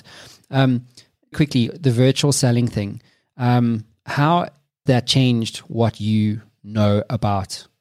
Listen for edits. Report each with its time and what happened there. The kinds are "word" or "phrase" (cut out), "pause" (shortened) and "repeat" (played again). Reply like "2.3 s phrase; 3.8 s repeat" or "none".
1.3 s word; 4.9 s word